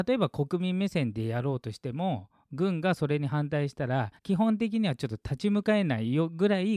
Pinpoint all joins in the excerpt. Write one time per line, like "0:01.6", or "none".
0:04.2